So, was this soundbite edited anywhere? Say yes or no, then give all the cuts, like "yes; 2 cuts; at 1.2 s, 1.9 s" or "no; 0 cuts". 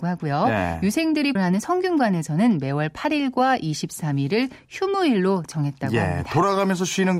yes; 1 cut; at 1.4 s